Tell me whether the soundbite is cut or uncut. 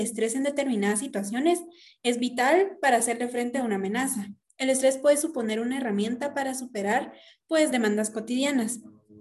uncut